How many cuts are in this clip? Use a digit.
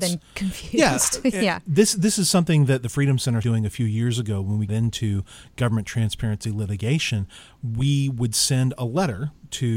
2